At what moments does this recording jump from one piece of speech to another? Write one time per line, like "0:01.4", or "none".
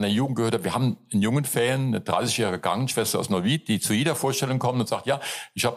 none